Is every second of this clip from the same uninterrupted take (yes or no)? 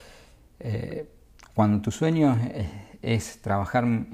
yes